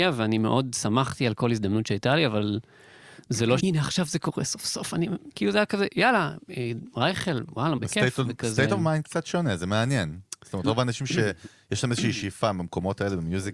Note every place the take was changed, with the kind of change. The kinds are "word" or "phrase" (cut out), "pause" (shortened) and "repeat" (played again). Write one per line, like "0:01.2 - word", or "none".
0:03.6 - word
0:07.8 - phrase